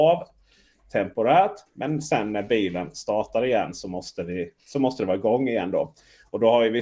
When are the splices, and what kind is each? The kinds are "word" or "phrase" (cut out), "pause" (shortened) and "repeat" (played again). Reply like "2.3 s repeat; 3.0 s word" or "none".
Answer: none